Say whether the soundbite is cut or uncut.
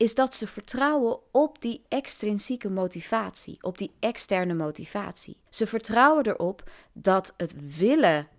cut